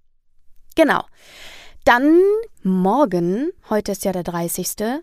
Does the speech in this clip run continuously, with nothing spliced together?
no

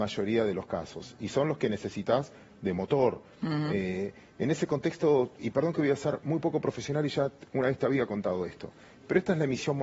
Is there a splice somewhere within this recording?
no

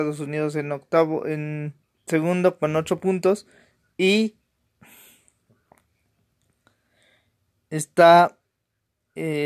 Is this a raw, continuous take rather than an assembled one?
no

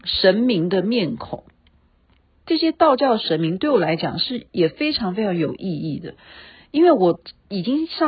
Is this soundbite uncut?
yes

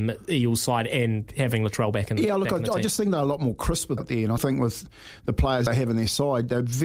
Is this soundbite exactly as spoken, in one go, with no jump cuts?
no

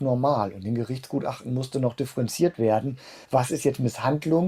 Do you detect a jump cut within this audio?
yes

